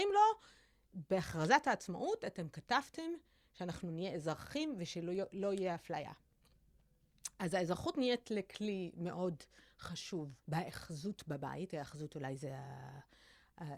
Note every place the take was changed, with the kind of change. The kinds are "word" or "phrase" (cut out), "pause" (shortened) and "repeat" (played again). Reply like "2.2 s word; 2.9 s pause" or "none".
10.4 s pause